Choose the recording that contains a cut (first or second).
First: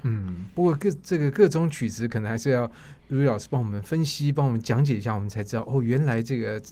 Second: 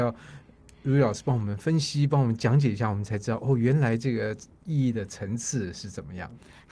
first